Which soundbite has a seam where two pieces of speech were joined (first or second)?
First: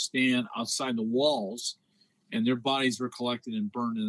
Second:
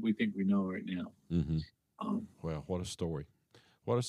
second